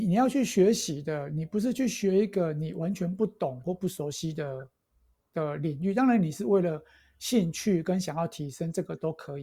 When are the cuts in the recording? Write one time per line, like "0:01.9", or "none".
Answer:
none